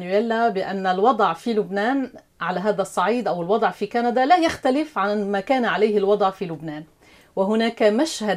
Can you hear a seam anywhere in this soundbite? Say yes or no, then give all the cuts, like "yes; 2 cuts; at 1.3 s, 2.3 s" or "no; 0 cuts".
no; 0 cuts